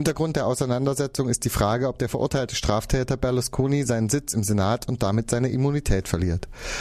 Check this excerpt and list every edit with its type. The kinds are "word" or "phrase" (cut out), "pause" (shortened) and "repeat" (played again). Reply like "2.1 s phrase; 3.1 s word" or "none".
none